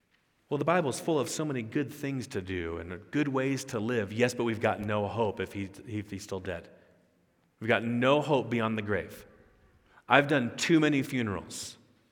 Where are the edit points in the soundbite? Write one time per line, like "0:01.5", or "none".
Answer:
none